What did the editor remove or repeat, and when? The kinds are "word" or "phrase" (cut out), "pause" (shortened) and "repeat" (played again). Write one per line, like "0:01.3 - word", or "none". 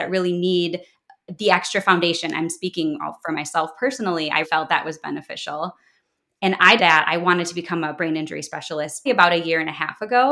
0:04.4 - word
0:06.8 - word
0:09.1 - word

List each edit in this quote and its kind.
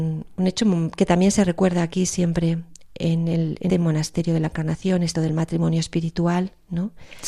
0:03.7 - word
0:05.1 - word

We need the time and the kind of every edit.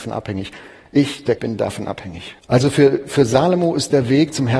0:01.4 - word
0:02.4 - pause

